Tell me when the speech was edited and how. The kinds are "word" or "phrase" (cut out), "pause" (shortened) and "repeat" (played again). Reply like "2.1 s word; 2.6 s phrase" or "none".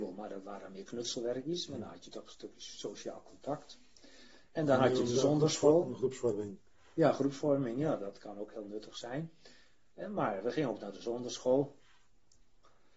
none